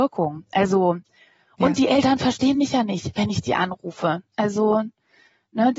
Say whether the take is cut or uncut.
uncut